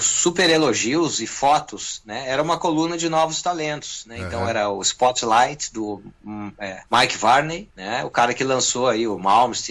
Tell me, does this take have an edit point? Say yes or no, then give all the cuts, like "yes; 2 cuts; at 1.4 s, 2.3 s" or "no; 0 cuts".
yes; 2 cuts; at 6.9 s, 7.7 s